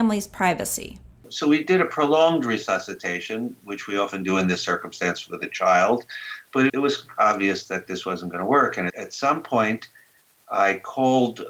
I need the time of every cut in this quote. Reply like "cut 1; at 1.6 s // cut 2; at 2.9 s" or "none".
cut 1; at 6.7 s // cut 2; at 8.9 s